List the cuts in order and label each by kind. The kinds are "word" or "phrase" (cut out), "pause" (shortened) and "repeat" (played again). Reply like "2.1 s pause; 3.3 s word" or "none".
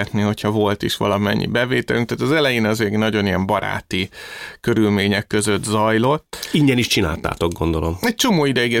none